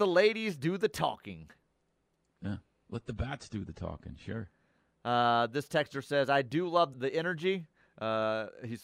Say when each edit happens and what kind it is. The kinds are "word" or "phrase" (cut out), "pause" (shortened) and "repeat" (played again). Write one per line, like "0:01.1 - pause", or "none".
0:06.9 - word